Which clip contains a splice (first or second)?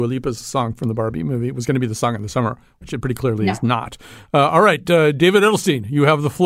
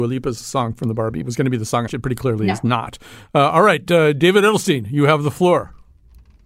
second